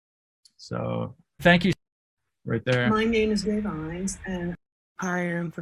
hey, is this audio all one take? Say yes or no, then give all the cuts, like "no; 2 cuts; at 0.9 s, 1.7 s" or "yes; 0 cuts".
no; 3 cuts; at 1.4 s, 2.5 s, 3.4 s